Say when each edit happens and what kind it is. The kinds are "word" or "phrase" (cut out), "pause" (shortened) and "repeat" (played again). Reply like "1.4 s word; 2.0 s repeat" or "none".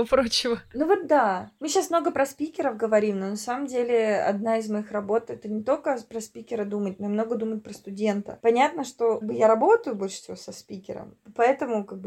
9.2 s word